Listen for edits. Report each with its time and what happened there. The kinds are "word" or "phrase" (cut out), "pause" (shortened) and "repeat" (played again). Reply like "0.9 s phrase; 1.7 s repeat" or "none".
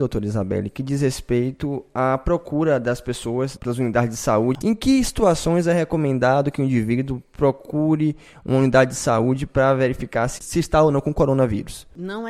3.6 s word